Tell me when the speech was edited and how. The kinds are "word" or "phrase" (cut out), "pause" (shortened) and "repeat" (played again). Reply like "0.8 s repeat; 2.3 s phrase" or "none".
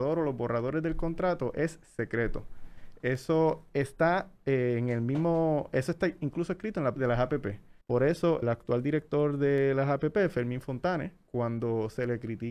7.0 s phrase; 7.8 s pause; 8.4 s word